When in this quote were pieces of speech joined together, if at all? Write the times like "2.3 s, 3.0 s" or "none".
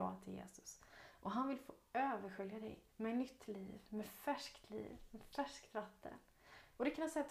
2.9 s